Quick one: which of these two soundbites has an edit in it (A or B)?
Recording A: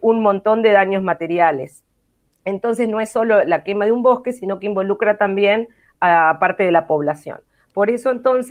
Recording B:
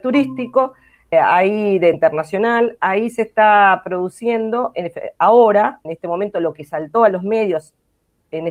B